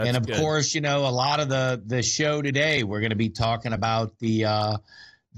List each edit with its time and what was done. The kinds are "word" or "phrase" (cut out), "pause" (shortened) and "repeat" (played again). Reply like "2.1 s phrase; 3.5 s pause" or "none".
none